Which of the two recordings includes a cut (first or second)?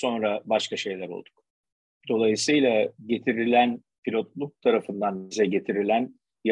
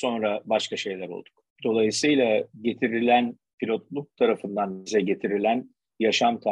second